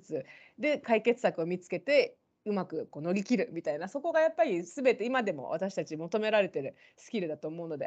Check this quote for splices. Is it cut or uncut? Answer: uncut